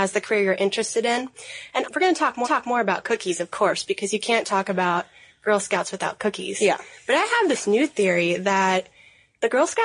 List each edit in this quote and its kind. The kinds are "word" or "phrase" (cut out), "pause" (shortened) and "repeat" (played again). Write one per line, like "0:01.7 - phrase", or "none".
0:01.8 - word
0:02.4 - repeat